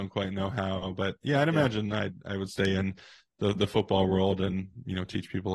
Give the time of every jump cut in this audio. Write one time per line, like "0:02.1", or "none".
none